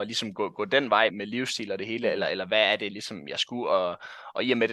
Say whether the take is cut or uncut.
cut